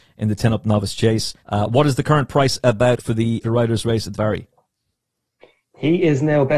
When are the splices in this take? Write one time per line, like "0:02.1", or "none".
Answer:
0:01.4
0:03.0
0:03.4
0:04.1